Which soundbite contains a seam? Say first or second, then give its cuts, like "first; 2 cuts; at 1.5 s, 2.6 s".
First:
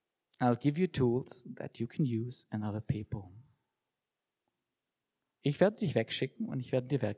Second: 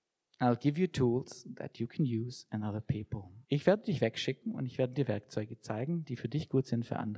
second; 1 cut; at 3.4 s